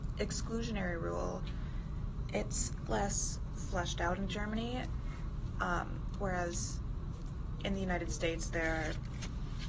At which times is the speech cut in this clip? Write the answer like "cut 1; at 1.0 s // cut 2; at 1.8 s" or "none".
cut 1; at 2.9 s